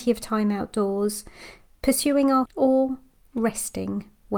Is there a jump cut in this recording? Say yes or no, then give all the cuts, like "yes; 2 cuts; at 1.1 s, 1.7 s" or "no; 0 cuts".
yes; 1 cut; at 2.5 s